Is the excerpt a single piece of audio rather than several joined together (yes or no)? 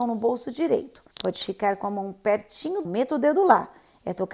no